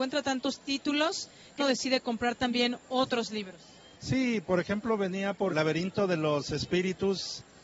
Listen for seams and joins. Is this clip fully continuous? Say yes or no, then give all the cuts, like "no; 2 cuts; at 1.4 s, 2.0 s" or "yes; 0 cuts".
no; 3 cuts; at 1.6 s, 3.9 s, 5.5 s